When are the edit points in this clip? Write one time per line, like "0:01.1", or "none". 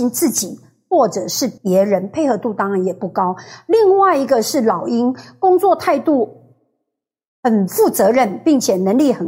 0:01.6